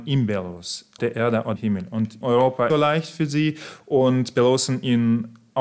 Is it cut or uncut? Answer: cut